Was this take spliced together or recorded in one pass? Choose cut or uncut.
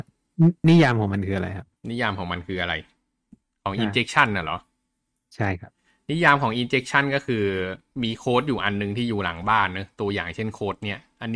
cut